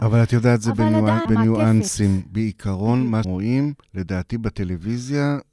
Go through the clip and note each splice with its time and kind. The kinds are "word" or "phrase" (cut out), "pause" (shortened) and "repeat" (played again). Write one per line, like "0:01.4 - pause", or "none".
0:01.3 - word
0:03.2 - word
0:03.8 - pause